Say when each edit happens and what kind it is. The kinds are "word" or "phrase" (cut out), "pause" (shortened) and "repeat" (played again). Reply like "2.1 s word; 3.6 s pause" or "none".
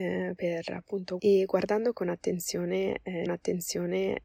1.2 s word; 3.3 s repeat